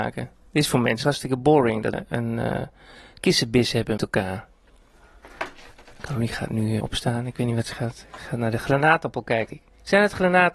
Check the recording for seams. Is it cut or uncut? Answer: cut